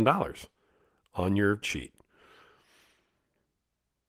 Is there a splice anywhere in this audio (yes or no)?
yes